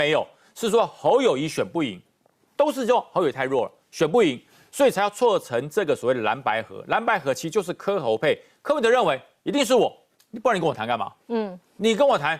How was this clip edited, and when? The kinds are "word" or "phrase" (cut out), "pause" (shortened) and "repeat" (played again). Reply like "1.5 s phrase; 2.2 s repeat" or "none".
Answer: none